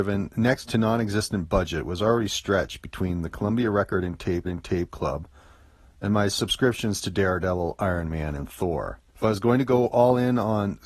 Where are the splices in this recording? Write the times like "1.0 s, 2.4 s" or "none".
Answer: 4.4 s, 9.1 s